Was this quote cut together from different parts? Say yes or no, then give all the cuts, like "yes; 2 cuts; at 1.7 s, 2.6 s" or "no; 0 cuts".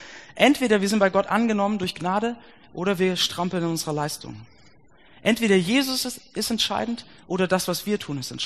no; 0 cuts